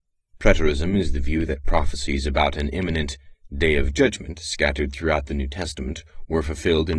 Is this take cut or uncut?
uncut